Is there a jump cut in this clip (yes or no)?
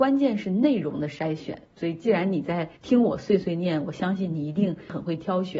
yes